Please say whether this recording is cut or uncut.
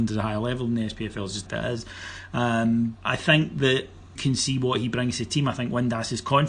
cut